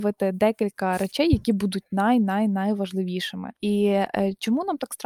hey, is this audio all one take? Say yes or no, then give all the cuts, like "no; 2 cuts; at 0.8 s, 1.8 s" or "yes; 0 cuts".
yes; 0 cuts